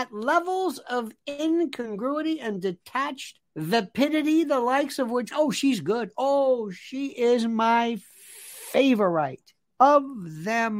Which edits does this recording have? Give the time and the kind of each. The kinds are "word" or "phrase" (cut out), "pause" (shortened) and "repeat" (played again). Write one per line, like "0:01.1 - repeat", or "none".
0:03.5 - pause
0:05.3 - phrase
0:07.1 - phrase